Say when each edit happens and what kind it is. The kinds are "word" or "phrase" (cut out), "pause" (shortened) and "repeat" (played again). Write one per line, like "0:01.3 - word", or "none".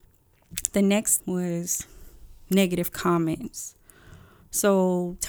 0:01.2 - word

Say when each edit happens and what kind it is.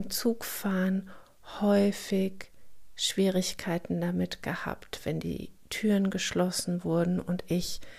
none

